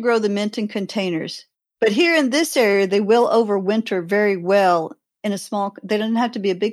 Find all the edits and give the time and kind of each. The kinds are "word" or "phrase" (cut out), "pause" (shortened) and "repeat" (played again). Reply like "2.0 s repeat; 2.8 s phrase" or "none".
none